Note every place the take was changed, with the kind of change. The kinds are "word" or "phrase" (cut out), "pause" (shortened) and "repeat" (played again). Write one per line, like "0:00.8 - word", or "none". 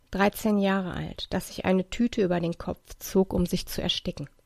none